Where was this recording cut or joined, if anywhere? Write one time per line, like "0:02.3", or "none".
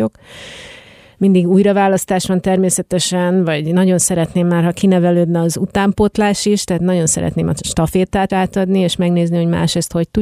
0:08.3